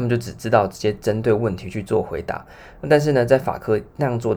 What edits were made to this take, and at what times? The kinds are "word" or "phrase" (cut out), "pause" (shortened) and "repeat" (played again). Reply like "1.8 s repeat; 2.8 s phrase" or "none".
none